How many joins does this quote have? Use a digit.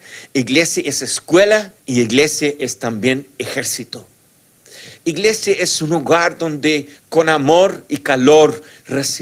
2